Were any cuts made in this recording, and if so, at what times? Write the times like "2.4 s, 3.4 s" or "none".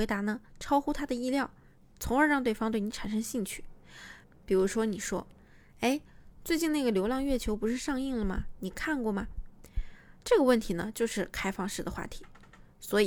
none